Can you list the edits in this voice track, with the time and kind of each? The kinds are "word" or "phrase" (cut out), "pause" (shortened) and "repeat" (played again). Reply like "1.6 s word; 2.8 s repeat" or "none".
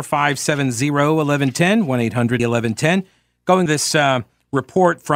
2.4 s word; 3.7 s word